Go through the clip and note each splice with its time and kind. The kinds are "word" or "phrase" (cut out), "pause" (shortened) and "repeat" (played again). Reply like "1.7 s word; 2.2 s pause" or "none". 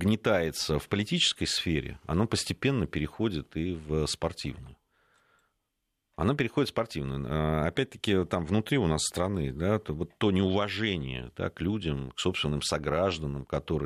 none